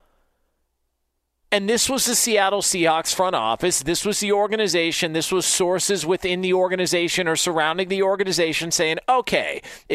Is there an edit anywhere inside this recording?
no; 0 cuts

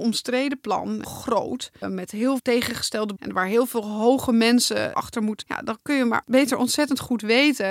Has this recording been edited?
yes; 6 cuts; at 1.0 s, 1.8 s, 2.4 s, 3.2 s, 4.9 s, 5.4 s

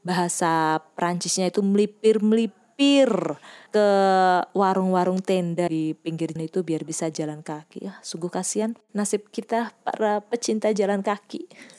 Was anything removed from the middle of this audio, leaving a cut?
yes; 2 cuts; at 5.7 s, 6.4 s

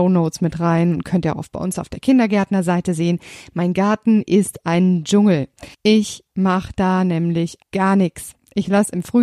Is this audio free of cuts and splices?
no; 2 cuts; at 5.7 s, 7.6 s

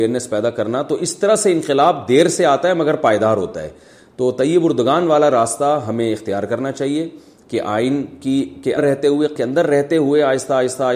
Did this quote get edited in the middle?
yes; 2 cuts; at 8.8 s, 9.4 s

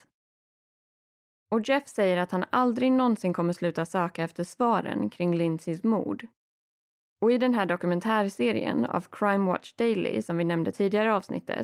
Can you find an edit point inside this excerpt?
no; 0 cuts

